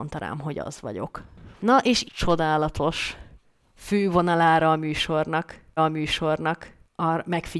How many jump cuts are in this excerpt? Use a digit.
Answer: 2